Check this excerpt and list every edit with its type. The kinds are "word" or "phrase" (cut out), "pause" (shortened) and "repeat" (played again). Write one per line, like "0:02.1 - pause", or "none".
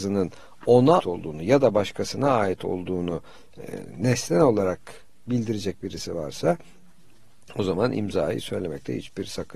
0:01.0 - word